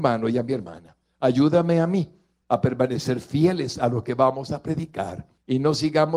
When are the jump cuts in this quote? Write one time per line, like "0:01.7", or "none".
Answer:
none